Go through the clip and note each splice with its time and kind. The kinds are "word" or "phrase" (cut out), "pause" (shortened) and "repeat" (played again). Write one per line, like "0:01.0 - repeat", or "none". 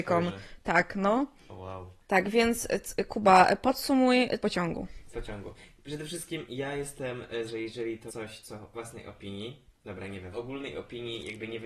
0:02.0 - pause
0:04.4 - phrase
0:05.1 - phrase
0:07.5 - word
0:08.1 - word
0:08.7 - word
0:09.7 - pause
0:10.3 - word

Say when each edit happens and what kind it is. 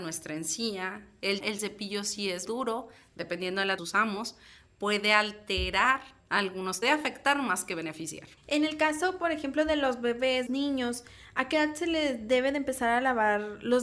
0:01.4 - word
0:02.5 - word
0:03.8 - phrase
0:06.8 - phrase
0:08.4 - pause
0:10.5 - phrase

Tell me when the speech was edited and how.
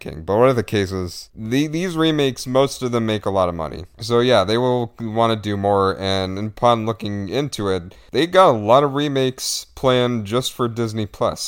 none

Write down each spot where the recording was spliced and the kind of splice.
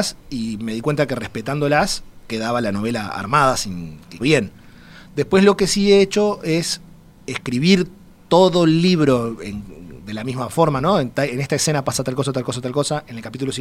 0:04.2 - word

